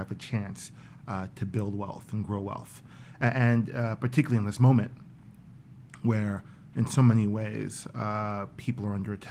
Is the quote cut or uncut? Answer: uncut